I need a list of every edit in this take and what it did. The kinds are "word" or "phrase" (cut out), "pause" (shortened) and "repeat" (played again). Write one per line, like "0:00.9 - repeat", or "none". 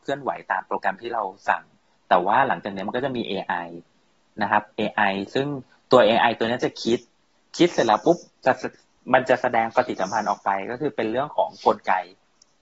none